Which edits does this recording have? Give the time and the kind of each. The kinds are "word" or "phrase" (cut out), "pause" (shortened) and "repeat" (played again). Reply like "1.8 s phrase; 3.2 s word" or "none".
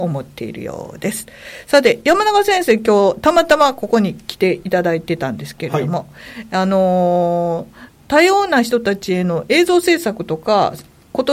7.9 s pause